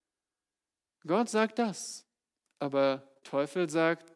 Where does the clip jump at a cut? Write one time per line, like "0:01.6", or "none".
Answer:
0:03.2